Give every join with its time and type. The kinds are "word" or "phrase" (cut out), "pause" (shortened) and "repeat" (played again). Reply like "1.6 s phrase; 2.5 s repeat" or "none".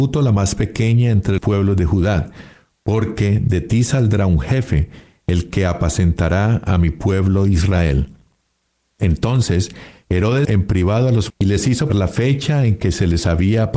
1.4 s word; 10.4 s word; 11.3 s word; 11.9 s word